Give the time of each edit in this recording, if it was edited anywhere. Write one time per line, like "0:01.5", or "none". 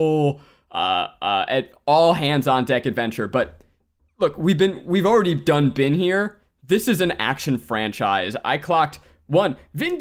none